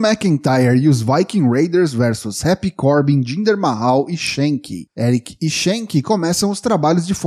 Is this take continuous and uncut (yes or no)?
yes